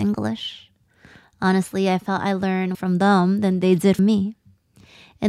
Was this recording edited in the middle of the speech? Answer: yes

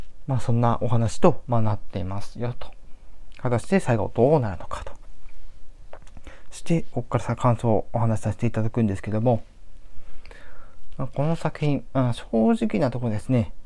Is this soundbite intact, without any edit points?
no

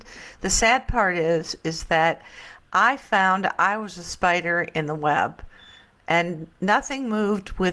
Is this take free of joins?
yes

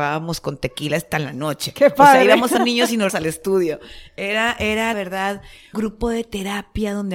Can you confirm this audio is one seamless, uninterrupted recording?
no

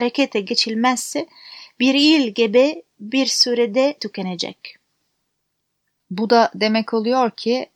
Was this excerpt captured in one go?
no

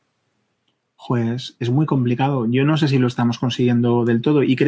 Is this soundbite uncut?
yes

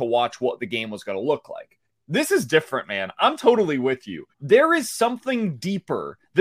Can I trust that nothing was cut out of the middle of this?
no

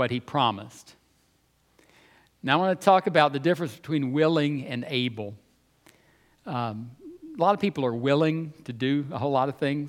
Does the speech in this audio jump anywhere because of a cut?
no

